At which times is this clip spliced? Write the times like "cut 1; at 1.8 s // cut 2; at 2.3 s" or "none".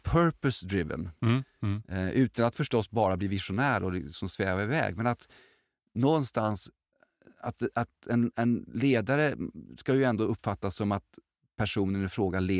none